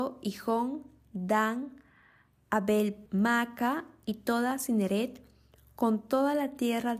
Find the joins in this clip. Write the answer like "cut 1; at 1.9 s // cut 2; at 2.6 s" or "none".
cut 1; at 3.1 s